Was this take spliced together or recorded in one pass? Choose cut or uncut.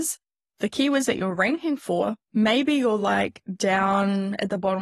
uncut